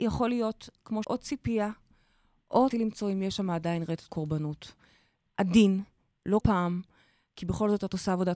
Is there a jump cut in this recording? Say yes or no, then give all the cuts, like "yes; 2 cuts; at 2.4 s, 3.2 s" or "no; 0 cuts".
yes; 4 cuts; at 1.0 s, 2.7 s, 4.1 s, 6.4 s